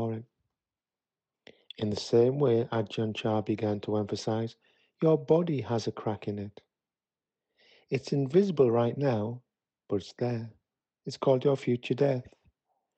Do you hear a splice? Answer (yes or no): no